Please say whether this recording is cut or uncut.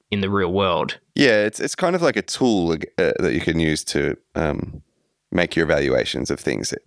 uncut